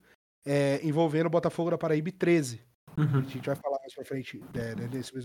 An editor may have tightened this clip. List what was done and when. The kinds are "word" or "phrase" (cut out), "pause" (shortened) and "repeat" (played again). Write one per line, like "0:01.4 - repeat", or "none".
none